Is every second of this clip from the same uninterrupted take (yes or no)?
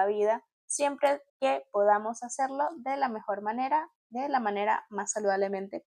no